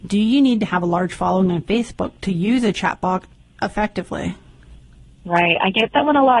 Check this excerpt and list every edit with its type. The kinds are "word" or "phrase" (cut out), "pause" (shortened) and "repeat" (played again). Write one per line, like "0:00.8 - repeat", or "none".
none